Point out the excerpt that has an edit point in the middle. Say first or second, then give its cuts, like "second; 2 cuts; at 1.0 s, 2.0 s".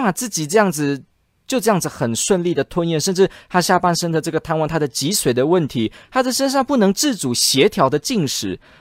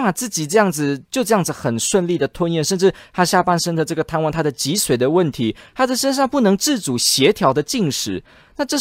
second; 1 cut; at 1.0 s